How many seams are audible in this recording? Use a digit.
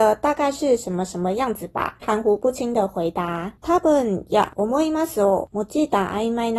1